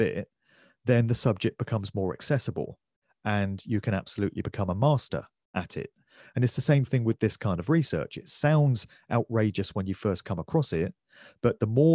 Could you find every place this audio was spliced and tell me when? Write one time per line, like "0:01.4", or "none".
none